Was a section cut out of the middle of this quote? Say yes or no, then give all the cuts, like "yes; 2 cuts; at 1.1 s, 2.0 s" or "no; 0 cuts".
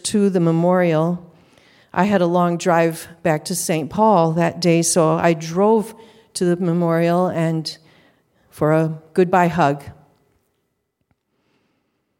no; 0 cuts